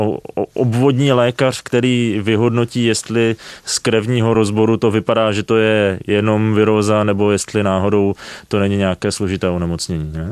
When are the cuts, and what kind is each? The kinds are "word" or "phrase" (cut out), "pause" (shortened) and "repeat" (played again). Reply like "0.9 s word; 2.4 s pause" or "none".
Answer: none